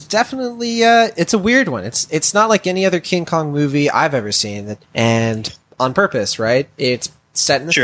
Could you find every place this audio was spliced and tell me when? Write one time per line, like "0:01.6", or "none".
0:04.8